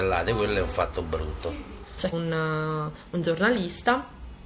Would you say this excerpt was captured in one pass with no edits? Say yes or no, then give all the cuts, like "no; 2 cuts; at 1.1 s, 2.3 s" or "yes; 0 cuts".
no; 1 cut; at 2.1 s